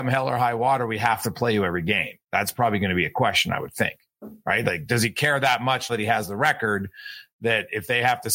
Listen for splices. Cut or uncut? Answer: cut